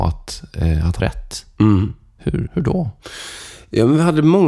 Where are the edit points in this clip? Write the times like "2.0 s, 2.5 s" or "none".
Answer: 1.0 s, 2.5 s

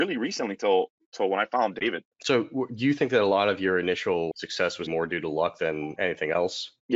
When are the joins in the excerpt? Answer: 4.9 s

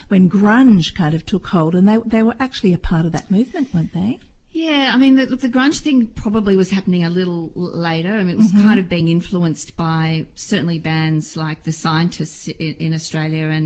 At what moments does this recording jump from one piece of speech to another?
none

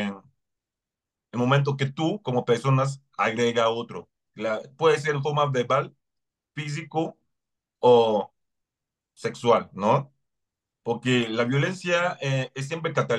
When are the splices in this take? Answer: none

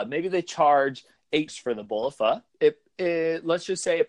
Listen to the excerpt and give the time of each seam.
1.5 s, 2.5 s

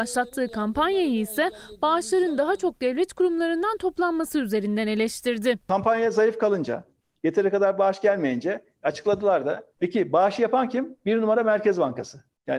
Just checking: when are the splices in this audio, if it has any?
none

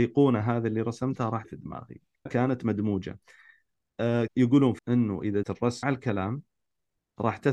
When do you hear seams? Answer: 1.4 s, 2.3 s, 4.3 s, 4.8 s, 5.4 s, 5.8 s

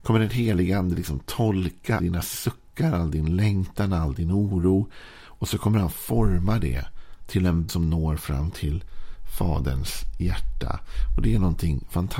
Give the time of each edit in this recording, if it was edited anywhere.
2.0 s, 7.7 s

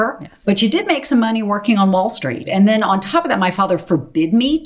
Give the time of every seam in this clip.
2.4 s

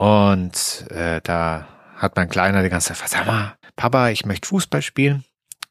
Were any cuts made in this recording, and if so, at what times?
3.6 s

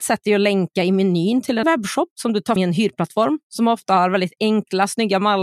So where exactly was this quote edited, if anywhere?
1.6 s, 2.6 s

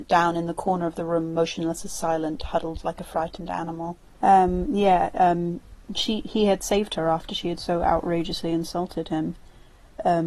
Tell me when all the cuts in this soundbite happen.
4.1 s

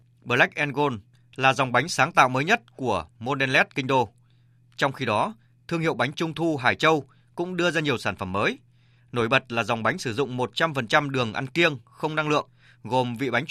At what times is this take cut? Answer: none

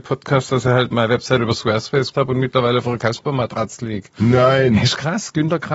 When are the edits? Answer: 0.9 s, 2.1 s

